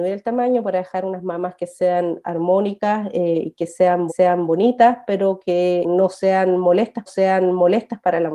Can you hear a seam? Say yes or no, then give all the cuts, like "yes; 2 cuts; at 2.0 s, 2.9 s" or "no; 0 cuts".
yes; 3 cuts; at 4.1 s, 5.8 s, 7.1 s